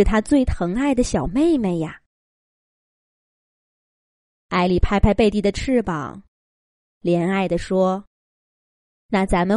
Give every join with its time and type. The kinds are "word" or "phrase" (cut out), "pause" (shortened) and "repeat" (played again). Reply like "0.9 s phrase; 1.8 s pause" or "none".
8.1 s pause